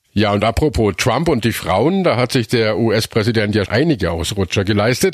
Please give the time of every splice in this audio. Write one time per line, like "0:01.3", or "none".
0:03.7